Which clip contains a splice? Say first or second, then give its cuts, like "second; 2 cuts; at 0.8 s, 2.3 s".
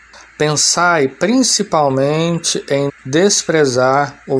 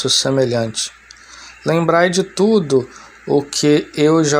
first; 1 cut; at 2.9 s